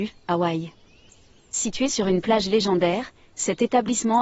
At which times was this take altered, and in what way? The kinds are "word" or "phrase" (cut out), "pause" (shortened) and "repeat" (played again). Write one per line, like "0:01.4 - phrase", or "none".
none

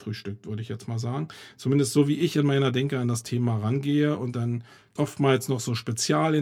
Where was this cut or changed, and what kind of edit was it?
0:05.0 - word

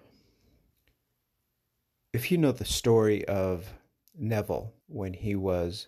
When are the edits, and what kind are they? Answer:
0:04.8 - pause

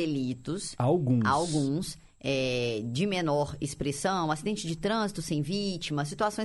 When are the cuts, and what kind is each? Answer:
none

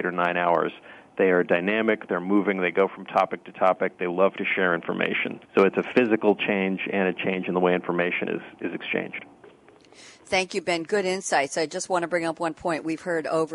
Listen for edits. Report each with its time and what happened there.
0:05.4 - pause

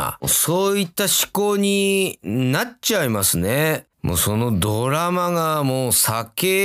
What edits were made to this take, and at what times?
0:03.9 - pause

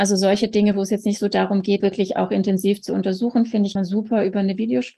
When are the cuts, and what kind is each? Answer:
0:01.8 - phrase
0:03.8 - word

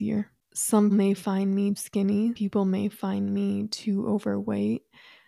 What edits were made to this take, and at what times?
0:00.9 - word
0:01.8 - word
0:02.4 - word

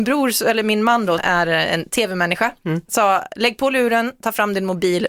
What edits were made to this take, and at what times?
0:01.2 - word

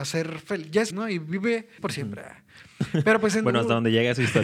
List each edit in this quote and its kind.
0:00.9 - word
0:01.8 - word

